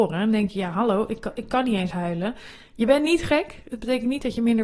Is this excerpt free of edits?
yes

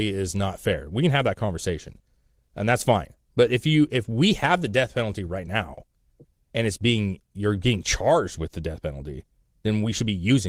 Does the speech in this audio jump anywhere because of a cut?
no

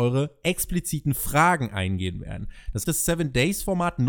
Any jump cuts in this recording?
yes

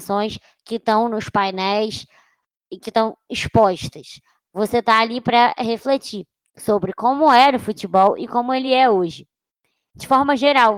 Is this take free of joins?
yes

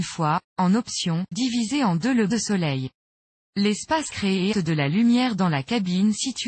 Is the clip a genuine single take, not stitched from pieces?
no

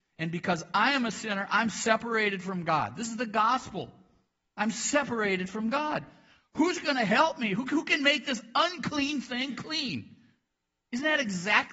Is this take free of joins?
yes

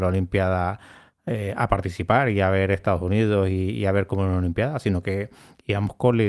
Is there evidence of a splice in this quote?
no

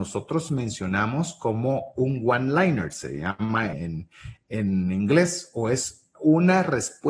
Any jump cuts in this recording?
yes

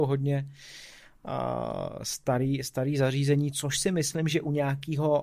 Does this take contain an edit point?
no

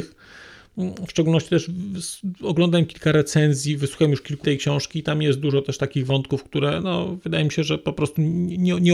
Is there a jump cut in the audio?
yes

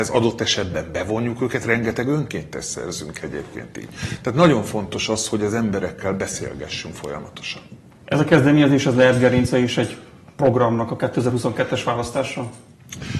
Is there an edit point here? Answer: no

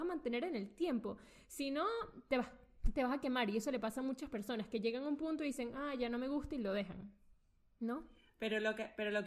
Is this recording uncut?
yes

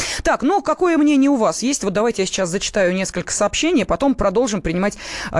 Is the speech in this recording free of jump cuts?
yes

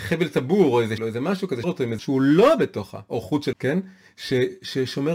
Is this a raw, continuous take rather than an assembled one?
no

